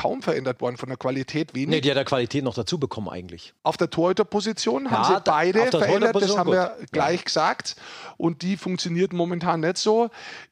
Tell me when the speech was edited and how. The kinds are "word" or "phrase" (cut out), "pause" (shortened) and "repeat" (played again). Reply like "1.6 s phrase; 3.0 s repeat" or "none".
3.6 s pause